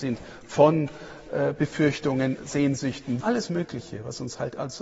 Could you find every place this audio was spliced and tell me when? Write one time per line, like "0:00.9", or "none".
0:02.4
0:03.2